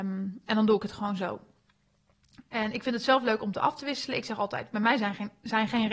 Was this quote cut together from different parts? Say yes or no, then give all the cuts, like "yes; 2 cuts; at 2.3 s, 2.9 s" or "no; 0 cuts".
no; 0 cuts